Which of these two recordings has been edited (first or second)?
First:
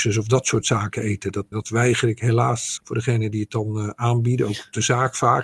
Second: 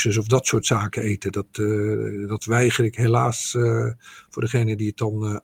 first